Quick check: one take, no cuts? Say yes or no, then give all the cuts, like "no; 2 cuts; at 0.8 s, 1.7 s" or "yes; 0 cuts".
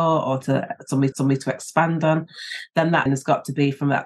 no; 2 cuts; at 1.1 s, 3.1 s